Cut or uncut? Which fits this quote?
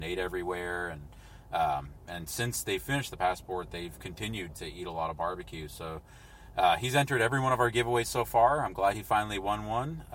cut